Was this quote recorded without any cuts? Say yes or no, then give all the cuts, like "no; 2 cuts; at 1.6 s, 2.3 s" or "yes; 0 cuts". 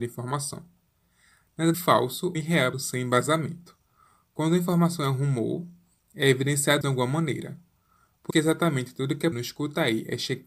no; 6 cuts; at 1.7 s, 2.3 s, 2.7 s, 6.8 s, 8.3 s, 9.3 s